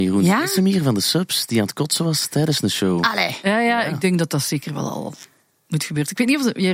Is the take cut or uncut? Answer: uncut